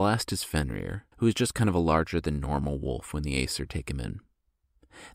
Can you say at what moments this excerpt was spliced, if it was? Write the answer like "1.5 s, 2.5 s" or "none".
1.1 s